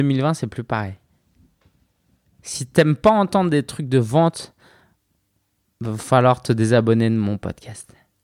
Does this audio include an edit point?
no; 0 cuts

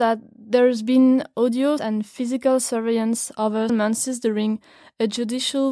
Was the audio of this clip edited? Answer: yes; 2 cuts; at 1.8 s, 3.7 s

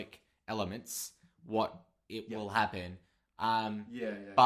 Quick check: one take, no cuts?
yes; 0 cuts

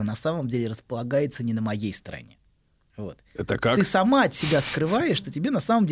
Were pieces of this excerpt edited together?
no; 0 cuts

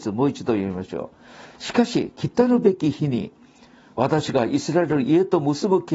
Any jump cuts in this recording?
no; 0 cuts

